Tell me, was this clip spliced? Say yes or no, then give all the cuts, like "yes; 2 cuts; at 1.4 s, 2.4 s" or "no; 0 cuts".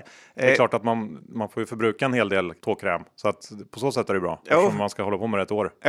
yes; 1 cut; at 2.6 s